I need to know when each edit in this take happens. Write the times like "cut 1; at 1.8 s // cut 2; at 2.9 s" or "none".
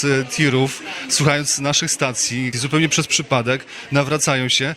cut 1; at 2.5 s